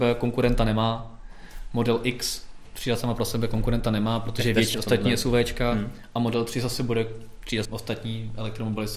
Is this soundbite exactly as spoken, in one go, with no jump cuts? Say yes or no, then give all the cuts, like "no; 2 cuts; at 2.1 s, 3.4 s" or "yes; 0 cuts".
no; 2 cuts; at 4.7 s, 7.6 s